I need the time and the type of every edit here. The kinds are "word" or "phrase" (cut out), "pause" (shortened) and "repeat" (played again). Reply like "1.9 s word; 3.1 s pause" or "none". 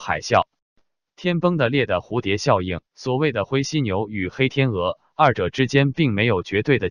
2.9 s pause